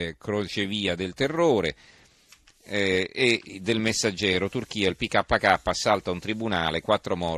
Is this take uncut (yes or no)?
yes